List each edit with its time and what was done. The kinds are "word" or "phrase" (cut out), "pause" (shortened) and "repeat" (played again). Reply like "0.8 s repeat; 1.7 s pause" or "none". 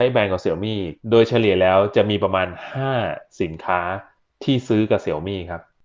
1.0 s pause